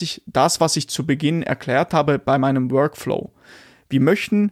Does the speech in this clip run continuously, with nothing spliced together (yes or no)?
yes